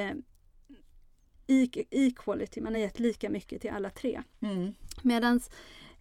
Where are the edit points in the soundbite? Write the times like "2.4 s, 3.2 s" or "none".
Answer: none